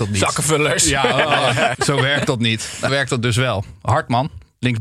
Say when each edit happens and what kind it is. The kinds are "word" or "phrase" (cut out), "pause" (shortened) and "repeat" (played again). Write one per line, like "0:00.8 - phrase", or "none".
0:01.7 - word
0:02.9 - word